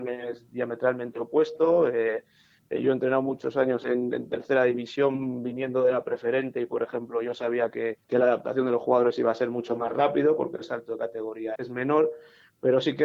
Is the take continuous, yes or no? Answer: no